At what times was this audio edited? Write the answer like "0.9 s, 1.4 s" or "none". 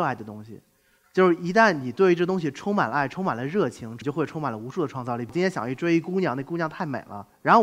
none